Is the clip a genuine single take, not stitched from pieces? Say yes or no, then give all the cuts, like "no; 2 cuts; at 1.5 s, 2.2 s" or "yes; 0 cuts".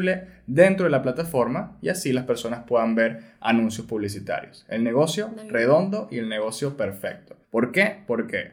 no; 1 cut; at 7.4 s